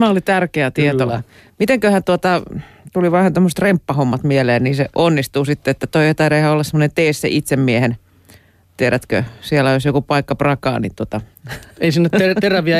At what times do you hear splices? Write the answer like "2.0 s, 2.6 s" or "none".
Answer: 4.9 s, 11.3 s